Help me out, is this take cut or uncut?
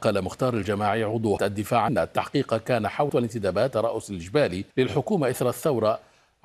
cut